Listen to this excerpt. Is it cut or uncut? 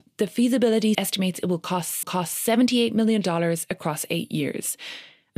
cut